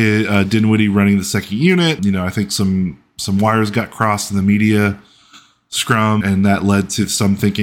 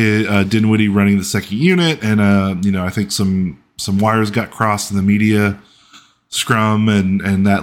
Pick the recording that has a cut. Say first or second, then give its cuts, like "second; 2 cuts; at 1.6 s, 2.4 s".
first; 2 cuts; at 2.0 s, 6.2 s